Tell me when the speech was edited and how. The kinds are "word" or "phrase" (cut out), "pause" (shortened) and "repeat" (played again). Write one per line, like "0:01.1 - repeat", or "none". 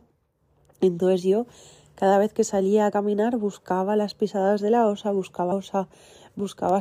0:05.5 - word